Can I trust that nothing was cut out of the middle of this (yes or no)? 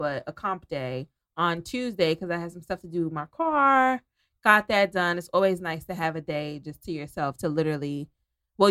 yes